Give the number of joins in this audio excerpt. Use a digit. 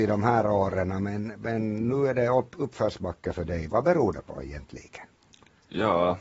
0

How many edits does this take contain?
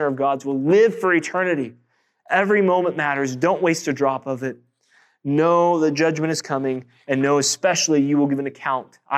0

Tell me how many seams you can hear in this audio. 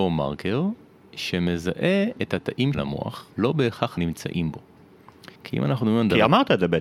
4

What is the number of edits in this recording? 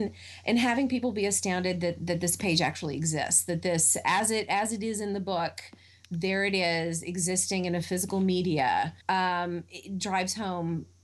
1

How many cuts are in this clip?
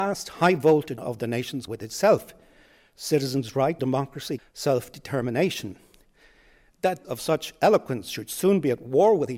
5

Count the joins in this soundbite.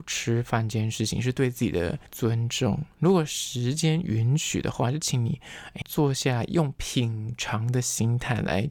2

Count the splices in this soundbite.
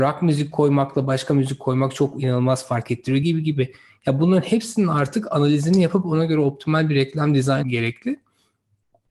2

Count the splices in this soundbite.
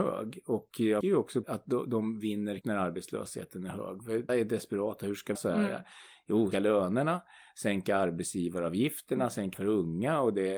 7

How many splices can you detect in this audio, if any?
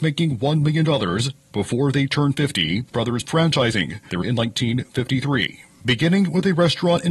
3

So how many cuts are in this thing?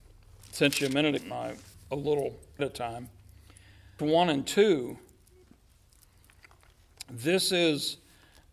4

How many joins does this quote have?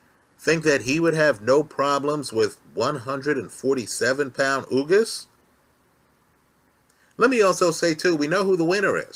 0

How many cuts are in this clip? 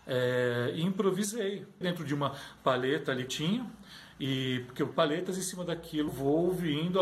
4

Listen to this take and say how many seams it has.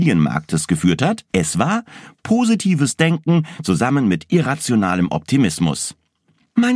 1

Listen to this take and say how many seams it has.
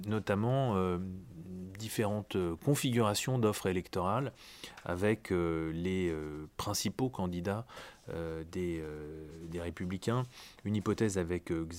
0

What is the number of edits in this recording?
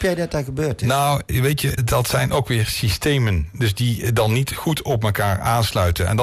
1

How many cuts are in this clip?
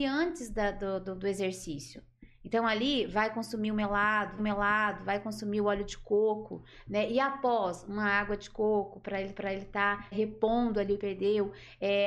4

